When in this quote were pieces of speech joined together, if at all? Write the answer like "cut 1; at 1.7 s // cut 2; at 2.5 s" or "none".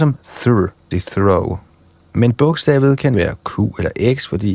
cut 1; at 0.9 s // cut 2; at 3.1 s

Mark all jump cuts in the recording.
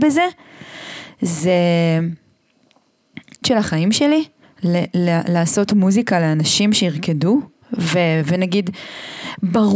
cut 1; at 3.4 s // cut 2; at 4.4 s

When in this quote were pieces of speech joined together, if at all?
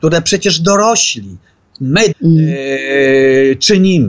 cut 1; at 2.1 s

